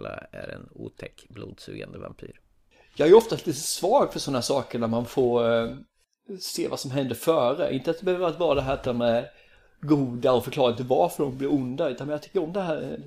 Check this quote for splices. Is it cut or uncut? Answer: uncut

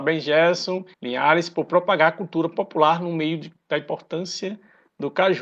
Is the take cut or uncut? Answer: cut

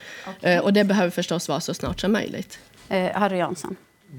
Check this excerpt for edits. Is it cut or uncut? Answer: uncut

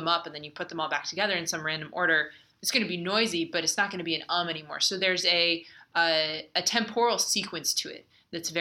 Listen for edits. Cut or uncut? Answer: uncut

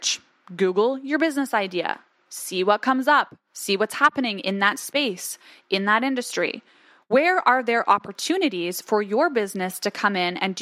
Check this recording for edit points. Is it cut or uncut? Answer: uncut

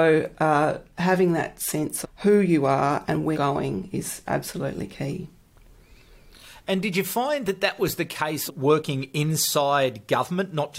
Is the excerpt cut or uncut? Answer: cut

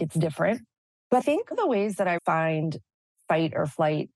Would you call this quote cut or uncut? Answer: cut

